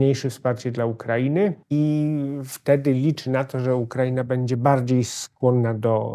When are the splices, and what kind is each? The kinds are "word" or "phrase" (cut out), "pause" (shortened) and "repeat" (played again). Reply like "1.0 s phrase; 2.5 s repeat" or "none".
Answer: 1.6 s pause